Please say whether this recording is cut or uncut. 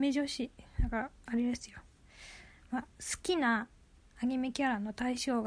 uncut